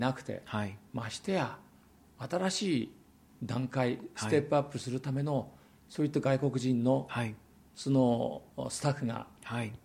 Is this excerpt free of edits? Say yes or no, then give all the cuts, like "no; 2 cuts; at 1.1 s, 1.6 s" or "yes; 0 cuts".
yes; 0 cuts